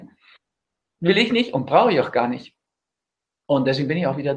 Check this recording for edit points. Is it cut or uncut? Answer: uncut